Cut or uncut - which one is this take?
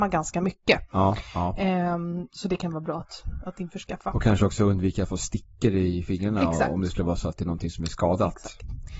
uncut